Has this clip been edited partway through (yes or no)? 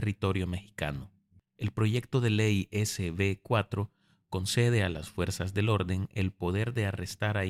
no